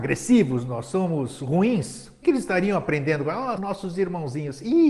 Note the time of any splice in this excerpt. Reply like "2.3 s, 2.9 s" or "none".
2.2 s, 3.6 s